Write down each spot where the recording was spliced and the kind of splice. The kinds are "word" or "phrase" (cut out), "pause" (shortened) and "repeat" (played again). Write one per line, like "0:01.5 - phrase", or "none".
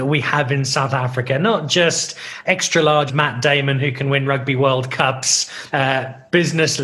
0:02.4 - word
0:03.1 - word
0:05.7 - word